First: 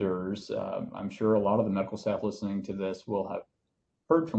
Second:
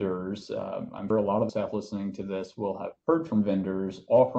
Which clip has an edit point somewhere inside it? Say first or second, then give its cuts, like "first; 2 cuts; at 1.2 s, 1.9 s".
second; 3 cuts; at 1.1 s, 1.5 s, 3.0 s